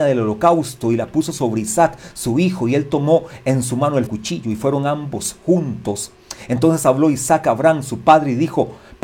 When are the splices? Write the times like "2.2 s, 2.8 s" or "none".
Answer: 4.1 s

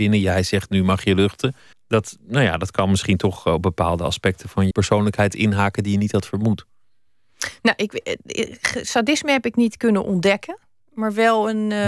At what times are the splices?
1.7 s, 4.7 s

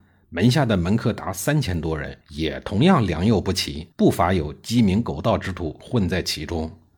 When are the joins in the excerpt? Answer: 2.2 s, 3.9 s

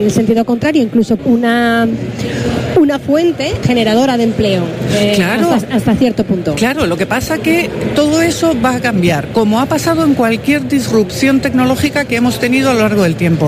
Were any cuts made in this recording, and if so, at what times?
1.2 s, 3.6 s

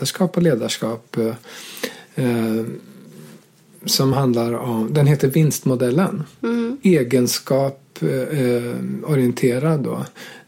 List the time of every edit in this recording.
none

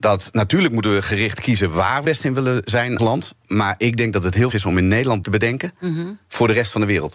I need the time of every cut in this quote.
2.0 s, 3.0 s, 4.5 s, 5.2 s

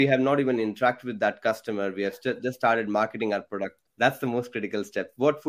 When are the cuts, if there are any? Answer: 3.9 s

